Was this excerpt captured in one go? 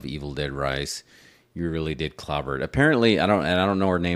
yes; 0 cuts

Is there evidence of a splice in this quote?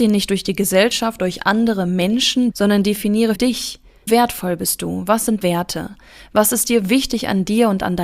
yes; 5 cuts; at 1.2 s, 2.5 s, 3.4 s, 4.1 s, 5.4 s

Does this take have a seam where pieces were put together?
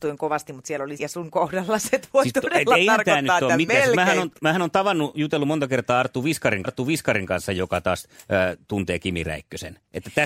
yes; 4 cuts; at 1.0 s, 3.7 s, 6.6 s, 8.1 s

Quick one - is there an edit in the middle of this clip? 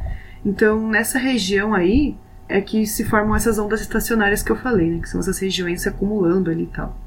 yes; 2 cuts; at 2.5 s, 5.8 s

